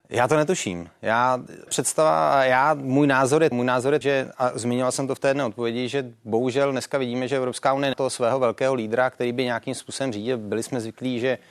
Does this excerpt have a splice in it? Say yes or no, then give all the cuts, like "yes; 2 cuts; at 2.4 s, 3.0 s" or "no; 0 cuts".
yes; 4 cuts; at 1.7 s, 3.5 s, 4.0 s, 7.9 s